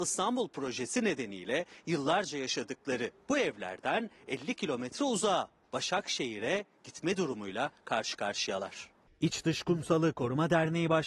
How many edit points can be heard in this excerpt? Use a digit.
0